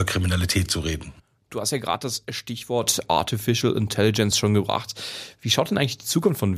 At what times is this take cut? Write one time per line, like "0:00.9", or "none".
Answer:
none